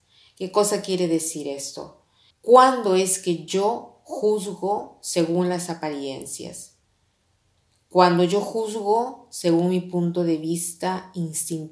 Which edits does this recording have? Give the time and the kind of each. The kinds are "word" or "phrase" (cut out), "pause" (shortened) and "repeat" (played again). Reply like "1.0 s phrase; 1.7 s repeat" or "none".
2.3 s pause